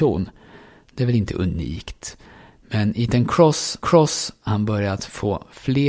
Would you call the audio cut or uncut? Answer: cut